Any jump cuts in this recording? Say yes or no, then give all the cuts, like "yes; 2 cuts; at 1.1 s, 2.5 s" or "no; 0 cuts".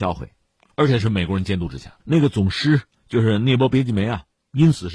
yes; 1 cut; at 2.0 s